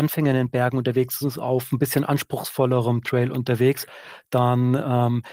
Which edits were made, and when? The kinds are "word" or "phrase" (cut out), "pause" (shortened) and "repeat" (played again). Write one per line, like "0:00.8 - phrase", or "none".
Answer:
0:01.2 - word
0:03.0 - word